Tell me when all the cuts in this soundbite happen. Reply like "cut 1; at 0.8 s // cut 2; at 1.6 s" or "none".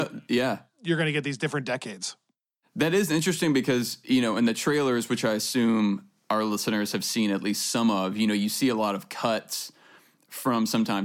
none